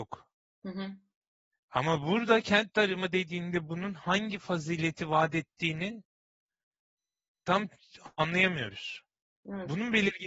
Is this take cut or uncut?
uncut